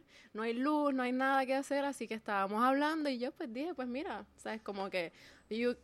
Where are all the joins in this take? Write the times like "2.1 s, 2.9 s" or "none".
none

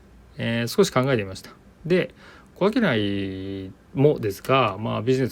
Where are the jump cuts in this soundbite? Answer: none

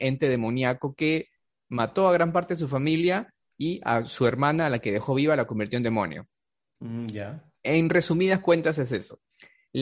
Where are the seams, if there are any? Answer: none

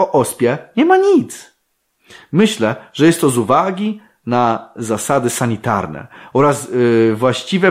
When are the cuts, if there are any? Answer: none

